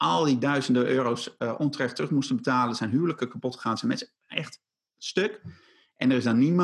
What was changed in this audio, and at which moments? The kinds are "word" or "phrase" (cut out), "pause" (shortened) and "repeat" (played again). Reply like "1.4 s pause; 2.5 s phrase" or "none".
none